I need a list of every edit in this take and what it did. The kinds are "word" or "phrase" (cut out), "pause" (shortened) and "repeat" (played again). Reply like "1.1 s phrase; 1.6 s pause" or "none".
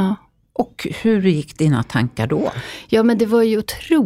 none